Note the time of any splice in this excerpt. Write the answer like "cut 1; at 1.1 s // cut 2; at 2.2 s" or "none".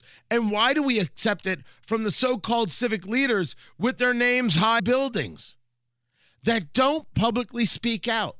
cut 1; at 4.8 s